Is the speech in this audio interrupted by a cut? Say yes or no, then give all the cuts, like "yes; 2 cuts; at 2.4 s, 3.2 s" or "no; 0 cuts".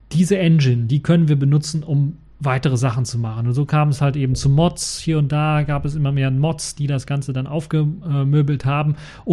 no; 0 cuts